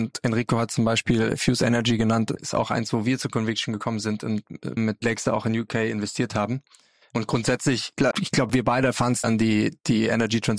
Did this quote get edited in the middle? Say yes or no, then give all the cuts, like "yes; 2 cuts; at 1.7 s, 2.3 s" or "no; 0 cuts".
yes; 4 cuts; at 2.4 s, 4.8 s, 8.1 s, 9.2 s